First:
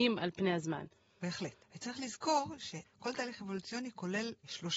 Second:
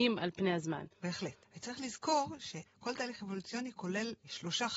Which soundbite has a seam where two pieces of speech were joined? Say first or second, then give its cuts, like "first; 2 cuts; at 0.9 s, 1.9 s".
second; 1 cut; at 0.9 s